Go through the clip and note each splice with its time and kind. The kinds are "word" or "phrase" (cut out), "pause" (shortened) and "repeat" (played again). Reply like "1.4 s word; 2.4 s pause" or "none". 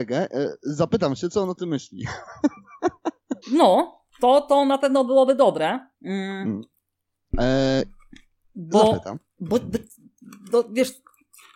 3.4 s pause; 5.9 s pause